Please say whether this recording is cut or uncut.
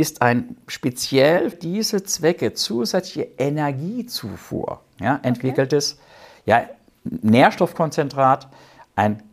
cut